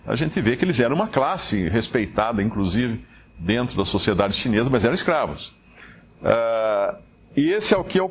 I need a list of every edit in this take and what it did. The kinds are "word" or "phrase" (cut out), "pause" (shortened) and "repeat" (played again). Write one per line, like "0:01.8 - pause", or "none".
none